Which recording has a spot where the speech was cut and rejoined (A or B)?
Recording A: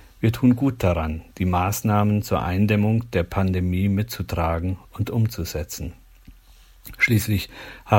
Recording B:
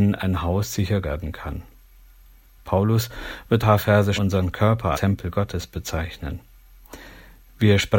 B